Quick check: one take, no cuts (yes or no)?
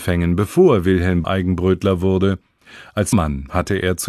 no